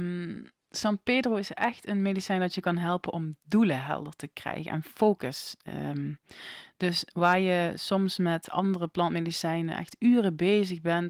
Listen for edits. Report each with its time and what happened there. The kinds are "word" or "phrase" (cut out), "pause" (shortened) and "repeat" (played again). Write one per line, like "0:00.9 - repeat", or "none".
none

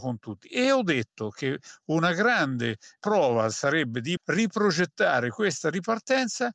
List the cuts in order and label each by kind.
0:04.2 - word

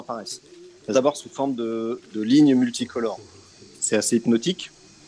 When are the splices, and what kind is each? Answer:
0:00.9 - word

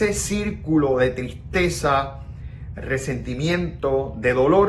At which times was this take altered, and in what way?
0:02.8 - word

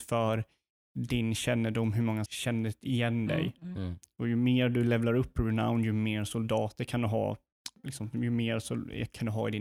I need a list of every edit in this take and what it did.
0:02.3 - phrase

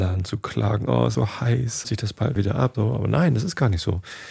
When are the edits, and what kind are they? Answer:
0:01.1 - word
0:01.8 - phrase
0:02.4 - word
0:02.7 - word

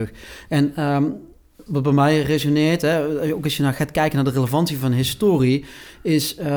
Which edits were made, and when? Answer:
0:01.7 - word

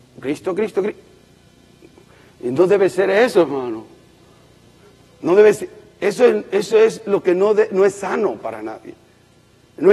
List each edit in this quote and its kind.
none

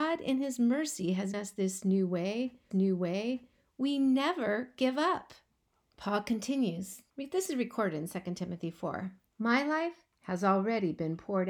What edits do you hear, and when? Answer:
0:01.3 - word
0:02.7 - repeat
0:05.6 - pause
0:07.1 - pause
0:09.3 - pause

